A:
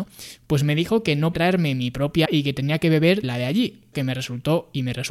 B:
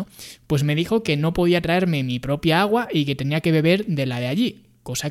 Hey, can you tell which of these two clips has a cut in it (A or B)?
A